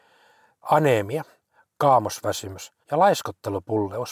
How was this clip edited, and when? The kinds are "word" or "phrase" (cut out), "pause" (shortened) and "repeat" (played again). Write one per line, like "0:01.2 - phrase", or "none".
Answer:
0:02.8 - pause

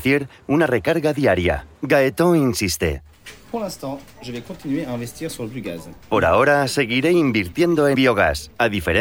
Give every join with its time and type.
0:01.8 - pause
0:06.0 - pause
0:07.9 - word

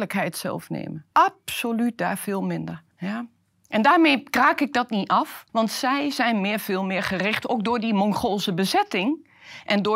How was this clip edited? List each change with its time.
0:01.1 - pause
0:02.9 - pause
0:05.5 - pause

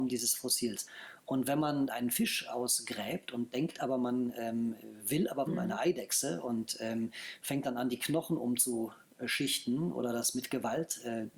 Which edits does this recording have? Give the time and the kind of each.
0:01.9 - word
0:05.5 - phrase

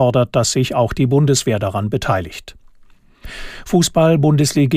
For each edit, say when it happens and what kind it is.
none

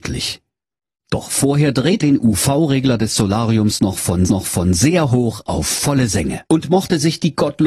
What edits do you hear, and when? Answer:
0:02.0 - word
0:04.3 - repeat
0:06.5 - pause

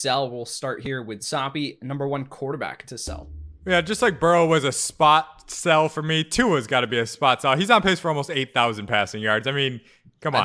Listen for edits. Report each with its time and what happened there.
none

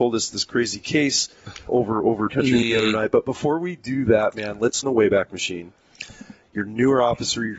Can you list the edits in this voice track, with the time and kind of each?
0:01.7 - word
0:02.3 - phrase
0:02.6 - word
0:04.8 - phrase

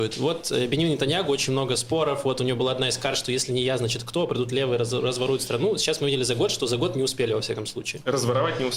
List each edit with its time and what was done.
none

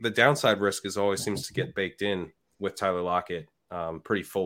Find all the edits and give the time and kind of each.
0:02.4 - pause

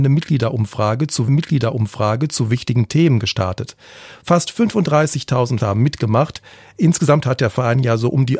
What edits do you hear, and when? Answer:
0:01.3 - repeat
0:05.6 - word

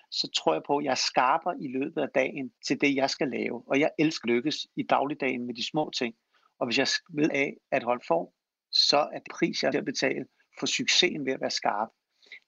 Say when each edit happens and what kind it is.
0:02.6 - pause
0:04.2 - word
0:07.3 - phrase
0:08.0 - word
0:09.3 - word
0:09.7 - phrase

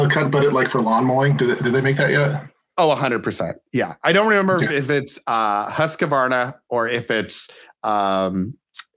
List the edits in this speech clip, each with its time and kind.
none

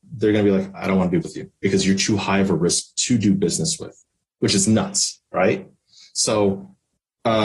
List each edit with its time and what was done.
0:01.2 - word

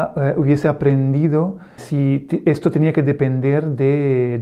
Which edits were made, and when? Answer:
0:01.8 - word

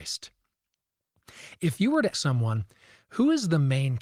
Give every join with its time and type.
0:02.1 - word

